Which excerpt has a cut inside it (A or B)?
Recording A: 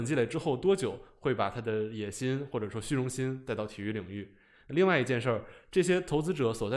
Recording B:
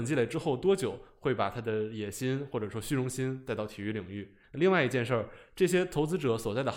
B